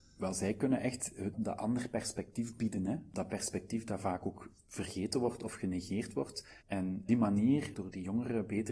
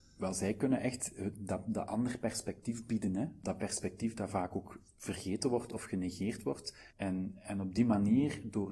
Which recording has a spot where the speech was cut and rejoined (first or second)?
first